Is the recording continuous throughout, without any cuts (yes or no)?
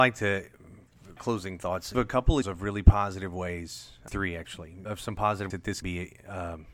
no